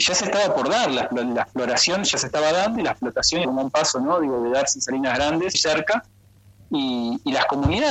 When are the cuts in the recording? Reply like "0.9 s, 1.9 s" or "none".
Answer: 3.4 s, 5.5 s